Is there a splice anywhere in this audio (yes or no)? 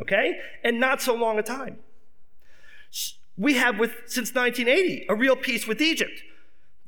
no